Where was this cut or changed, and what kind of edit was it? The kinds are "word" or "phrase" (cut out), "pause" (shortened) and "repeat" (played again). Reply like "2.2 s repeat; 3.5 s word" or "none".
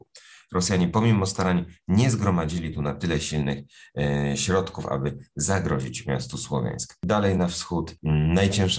none

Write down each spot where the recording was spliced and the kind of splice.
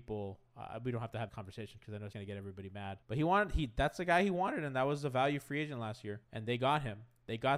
1.3 s word; 2.1 s word; 3.0 s pause; 6.2 s pause

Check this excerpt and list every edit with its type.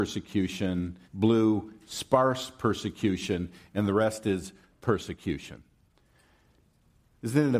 1.0 s pause; 4.7 s word

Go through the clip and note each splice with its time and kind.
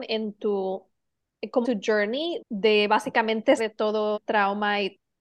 1.6 s word; 2.4 s word; 3.6 s word; 4.1 s word

